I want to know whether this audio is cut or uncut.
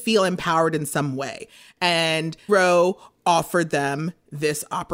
cut